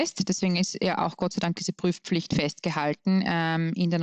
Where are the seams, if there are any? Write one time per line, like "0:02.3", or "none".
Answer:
none